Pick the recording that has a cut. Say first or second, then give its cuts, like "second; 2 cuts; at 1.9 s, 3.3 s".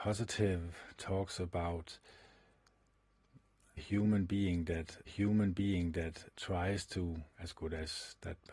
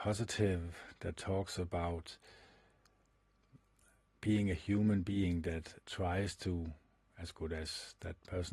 first; 4 cuts; at 1.0 s, 3.8 s, 5.1 s, 7.3 s